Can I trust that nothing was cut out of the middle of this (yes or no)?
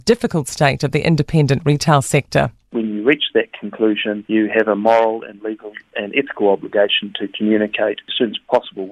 yes